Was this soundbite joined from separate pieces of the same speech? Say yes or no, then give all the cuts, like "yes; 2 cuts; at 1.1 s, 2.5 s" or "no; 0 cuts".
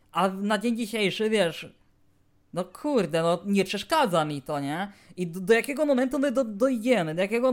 no; 0 cuts